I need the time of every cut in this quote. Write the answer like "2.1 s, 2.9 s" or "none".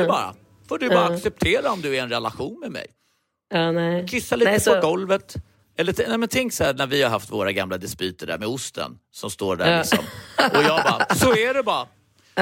none